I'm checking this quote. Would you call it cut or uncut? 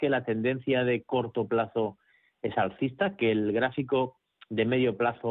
uncut